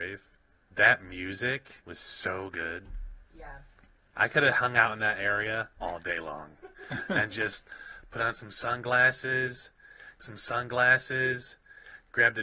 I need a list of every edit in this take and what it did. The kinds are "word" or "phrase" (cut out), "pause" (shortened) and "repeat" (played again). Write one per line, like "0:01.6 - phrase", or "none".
0:01.8 - pause
0:05.7 - pause
0:10.2 - repeat